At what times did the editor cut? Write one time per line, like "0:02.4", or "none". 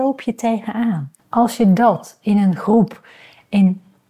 0:01.2

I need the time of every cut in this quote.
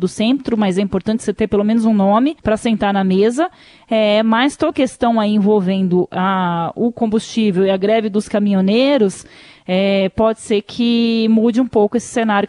0:02.4
0:04.7

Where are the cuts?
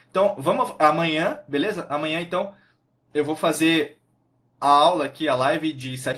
0:04.6

